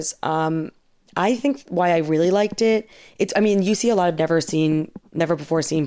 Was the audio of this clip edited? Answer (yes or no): no